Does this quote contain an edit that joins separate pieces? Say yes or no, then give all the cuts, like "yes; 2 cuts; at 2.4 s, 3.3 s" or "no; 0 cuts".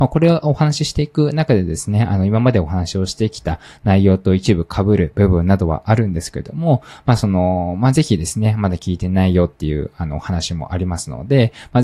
no; 0 cuts